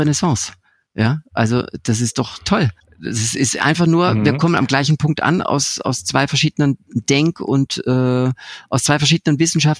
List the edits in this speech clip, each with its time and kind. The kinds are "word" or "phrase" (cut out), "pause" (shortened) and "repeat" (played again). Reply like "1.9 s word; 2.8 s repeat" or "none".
2.8 s pause